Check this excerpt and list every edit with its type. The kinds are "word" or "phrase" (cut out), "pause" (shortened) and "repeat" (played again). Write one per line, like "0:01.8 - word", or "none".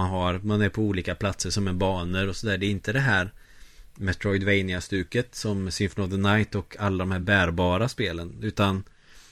none